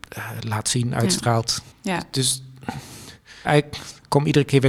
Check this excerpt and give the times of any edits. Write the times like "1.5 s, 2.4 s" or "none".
1.7 s, 3.4 s